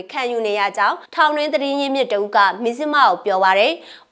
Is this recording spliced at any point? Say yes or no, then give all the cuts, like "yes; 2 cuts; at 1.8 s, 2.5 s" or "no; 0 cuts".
yes; 1 cut; at 1.1 s